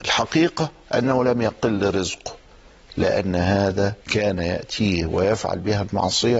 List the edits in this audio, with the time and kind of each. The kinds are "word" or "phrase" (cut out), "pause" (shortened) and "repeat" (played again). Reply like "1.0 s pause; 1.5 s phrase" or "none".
4.0 s pause